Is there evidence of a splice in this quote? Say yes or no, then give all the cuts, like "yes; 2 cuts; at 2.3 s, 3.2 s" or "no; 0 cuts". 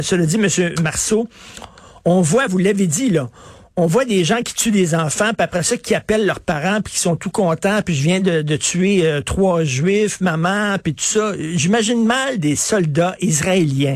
no; 0 cuts